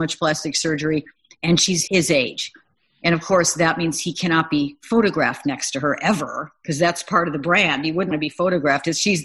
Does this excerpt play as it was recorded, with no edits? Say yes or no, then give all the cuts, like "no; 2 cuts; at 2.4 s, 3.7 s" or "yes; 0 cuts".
no; 2 cuts; at 1.9 s, 8.1 s